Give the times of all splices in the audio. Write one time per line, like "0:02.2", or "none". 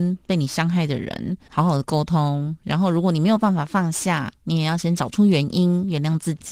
0:01.5